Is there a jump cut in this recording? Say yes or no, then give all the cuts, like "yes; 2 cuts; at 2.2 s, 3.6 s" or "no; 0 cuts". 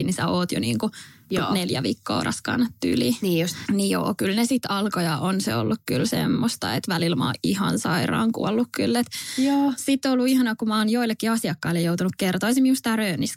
no; 0 cuts